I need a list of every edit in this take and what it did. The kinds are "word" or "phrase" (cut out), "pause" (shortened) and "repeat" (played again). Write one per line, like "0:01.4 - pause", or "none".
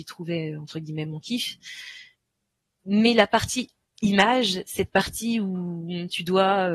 none

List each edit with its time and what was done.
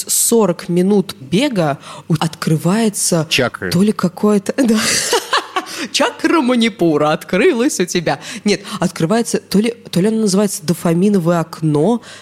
0:01.2 - word
0:02.2 - word

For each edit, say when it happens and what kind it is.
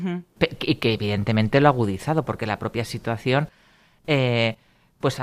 none

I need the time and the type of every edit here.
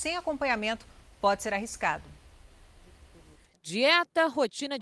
none

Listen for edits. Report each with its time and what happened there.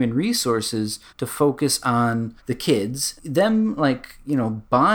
0:01.1 - pause
0:02.4 - pause
0:03.2 - phrase

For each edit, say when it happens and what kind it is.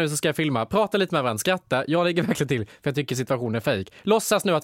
none

